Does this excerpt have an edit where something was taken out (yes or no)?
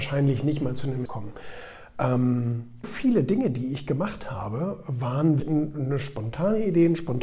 yes